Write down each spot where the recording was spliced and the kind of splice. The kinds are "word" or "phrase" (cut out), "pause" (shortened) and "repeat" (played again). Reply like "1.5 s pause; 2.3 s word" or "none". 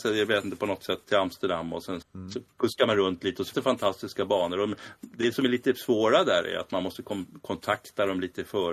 1.0 s word; 2.0 s word; 3.5 s word